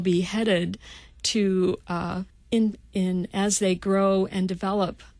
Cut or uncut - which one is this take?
cut